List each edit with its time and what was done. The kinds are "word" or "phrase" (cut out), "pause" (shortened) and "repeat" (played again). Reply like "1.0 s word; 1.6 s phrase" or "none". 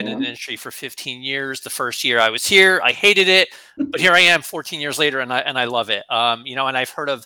3.8 s word